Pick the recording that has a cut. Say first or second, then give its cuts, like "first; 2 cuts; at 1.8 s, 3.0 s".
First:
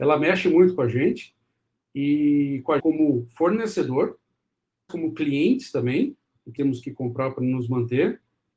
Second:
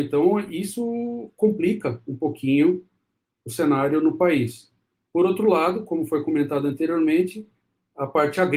first; 3 cuts; at 2.8 s, 4.9 s, 6.6 s